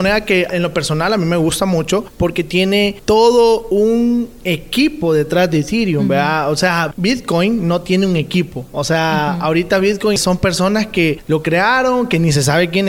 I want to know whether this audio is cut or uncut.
uncut